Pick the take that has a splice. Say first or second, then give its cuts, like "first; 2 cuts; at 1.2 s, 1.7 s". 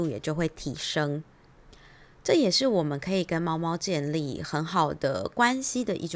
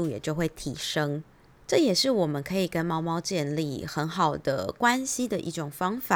second; 1 cut; at 1.6 s